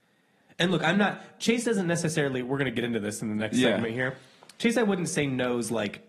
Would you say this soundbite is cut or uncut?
uncut